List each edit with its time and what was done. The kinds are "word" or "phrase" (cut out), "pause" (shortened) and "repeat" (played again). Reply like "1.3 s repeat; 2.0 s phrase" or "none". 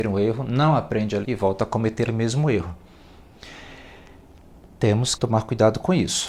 1.2 s word; 2.1 s word; 5.1 s word